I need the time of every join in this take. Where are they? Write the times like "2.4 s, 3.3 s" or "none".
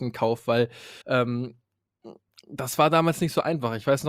1.0 s